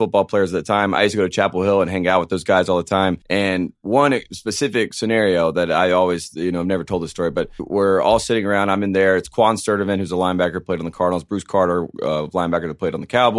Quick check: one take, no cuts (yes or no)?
no